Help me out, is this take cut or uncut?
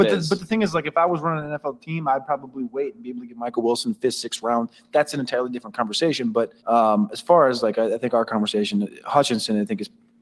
cut